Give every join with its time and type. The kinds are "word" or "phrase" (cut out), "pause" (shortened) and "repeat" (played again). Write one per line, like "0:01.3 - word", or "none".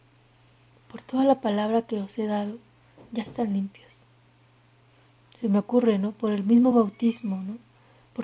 none